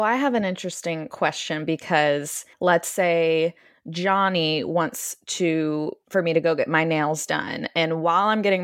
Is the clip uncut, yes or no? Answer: no